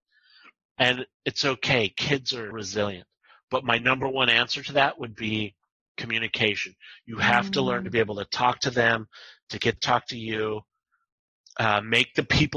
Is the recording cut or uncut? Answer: cut